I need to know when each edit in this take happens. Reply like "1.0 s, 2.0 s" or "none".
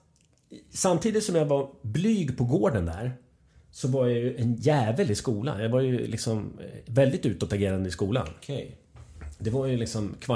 none